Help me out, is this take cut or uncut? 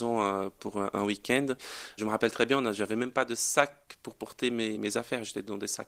uncut